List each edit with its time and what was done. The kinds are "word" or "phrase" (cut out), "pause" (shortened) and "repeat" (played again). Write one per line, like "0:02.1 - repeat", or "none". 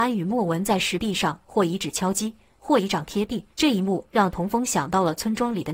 0:03.5 - pause